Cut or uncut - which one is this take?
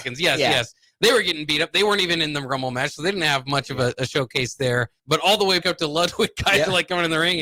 cut